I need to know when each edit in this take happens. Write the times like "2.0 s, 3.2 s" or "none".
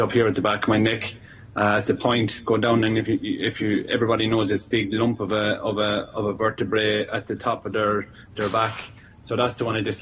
none

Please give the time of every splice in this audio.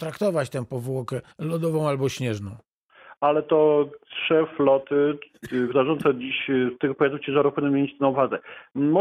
1.3 s, 5.7 s

